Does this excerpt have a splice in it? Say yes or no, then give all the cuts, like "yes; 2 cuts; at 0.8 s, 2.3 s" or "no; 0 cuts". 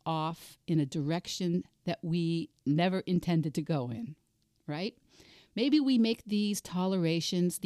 no; 0 cuts